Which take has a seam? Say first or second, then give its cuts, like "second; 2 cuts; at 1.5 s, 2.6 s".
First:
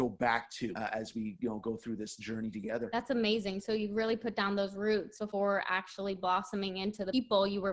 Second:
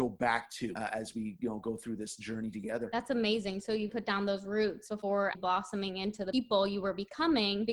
second; 2 cuts; at 3.9 s, 5.3 s